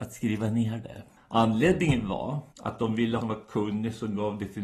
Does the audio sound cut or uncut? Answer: cut